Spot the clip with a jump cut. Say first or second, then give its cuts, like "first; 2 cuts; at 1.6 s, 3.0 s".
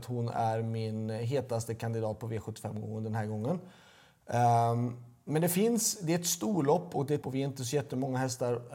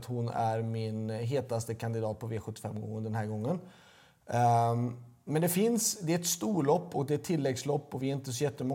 first; 1 cut; at 7.2 s